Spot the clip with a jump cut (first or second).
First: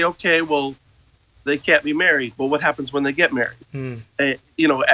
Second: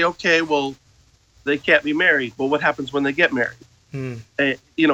first